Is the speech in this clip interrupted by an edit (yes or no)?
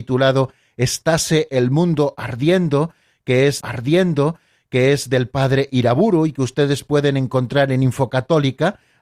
yes